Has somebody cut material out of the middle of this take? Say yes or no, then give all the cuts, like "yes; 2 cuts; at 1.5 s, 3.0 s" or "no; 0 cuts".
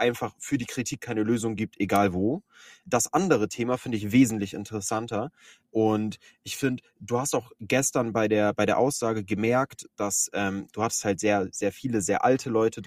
no; 0 cuts